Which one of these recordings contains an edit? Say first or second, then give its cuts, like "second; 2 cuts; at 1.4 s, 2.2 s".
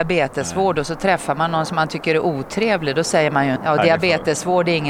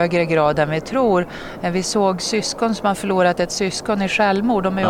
first; 1 cut; at 3.6 s